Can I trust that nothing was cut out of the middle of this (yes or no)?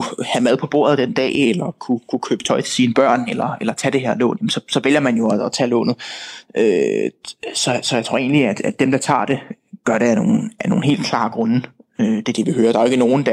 yes